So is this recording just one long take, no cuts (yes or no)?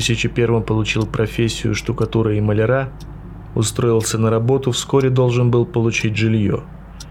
yes